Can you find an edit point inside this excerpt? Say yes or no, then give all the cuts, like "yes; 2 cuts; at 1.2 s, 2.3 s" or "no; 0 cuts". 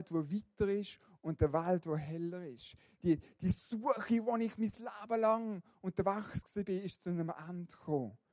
no; 0 cuts